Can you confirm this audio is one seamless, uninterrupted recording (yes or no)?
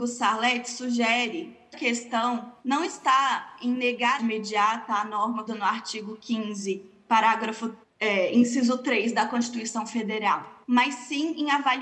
no